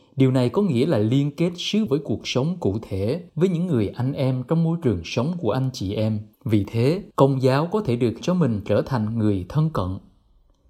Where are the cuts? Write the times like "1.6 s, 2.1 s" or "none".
1.9 s, 3.3 s, 6.3 s, 7.1 s, 8.2 s

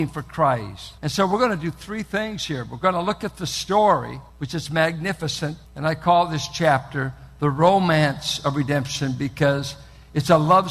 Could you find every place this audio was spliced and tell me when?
1.0 s, 4.3 s, 5.6 s

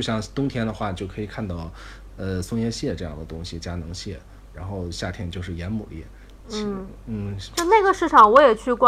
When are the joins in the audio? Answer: 4.5 s

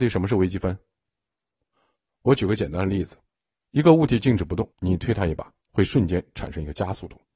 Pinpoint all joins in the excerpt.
3.4 s, 4.7 s, 5.6 s

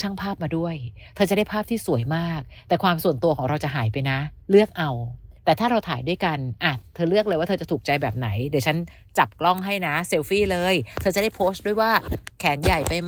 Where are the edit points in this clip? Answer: 4.4 s, 5.4 s

